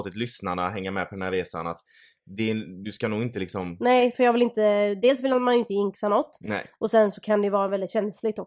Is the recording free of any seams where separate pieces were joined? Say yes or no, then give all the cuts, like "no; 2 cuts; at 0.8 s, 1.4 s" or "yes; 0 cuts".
yes; 0 cuts